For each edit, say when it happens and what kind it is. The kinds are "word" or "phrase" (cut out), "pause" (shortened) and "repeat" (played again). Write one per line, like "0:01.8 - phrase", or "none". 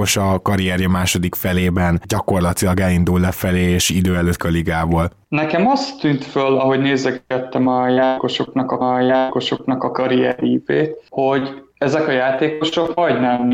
0:04.4 - word
0:08.8 - repeat